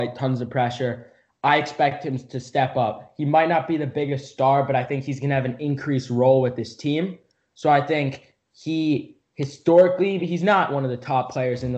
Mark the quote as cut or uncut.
cut